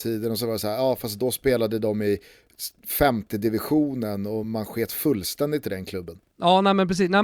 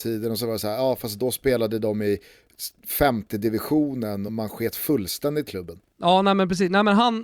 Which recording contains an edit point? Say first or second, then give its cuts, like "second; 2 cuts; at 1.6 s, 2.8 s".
second; 2 cuts; at 4.3 s, 5.5 s